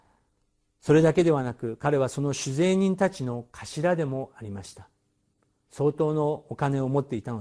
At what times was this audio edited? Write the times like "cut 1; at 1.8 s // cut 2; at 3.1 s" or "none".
none